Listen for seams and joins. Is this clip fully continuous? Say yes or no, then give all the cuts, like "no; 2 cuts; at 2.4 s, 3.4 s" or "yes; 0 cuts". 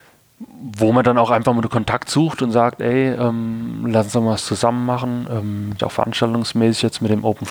no; 1 cut; at 5.8 s